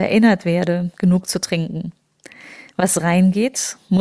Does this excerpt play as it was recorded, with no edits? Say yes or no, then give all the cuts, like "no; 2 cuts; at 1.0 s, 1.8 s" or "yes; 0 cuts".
yes; 0 cuts